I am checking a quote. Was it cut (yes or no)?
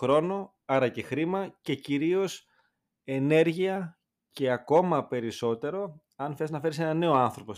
no